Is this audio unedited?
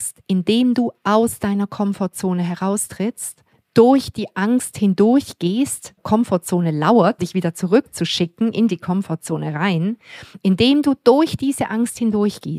no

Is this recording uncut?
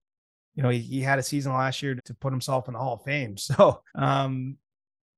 no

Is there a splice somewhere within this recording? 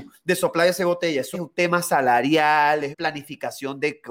yes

